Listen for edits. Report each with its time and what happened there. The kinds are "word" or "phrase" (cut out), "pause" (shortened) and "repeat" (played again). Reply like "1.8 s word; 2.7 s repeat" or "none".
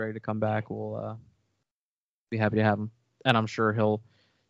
none